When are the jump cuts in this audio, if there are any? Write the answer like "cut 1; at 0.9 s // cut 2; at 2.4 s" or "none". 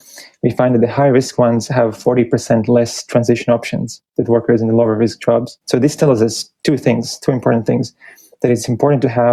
cut 1; at 4.1 s // cut 2; at 5.6 s